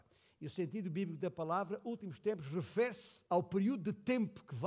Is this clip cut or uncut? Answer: cut